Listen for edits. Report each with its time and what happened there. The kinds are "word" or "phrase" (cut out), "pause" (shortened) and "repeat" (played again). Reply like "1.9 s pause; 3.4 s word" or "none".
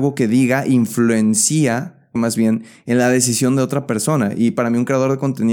2.2 s word